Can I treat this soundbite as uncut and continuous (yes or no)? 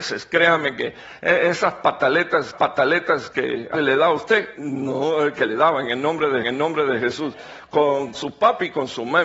no